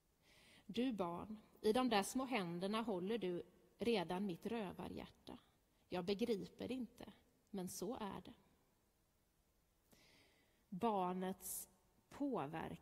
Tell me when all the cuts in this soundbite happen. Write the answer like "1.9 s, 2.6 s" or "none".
none